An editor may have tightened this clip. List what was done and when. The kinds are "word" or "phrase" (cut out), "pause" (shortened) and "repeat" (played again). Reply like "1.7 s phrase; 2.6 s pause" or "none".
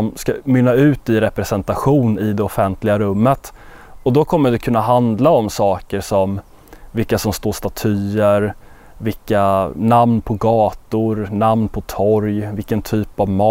none

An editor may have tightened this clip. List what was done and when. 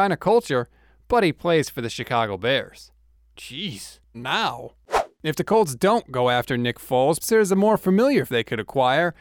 4.1 s word; 7.2 s word; 8.3 s word

